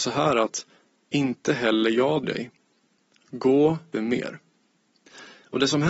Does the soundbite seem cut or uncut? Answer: cut